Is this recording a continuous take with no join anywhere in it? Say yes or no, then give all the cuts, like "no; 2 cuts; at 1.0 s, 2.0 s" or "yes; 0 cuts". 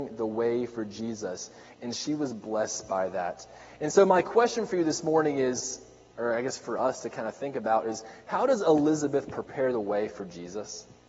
yes; 0 cuts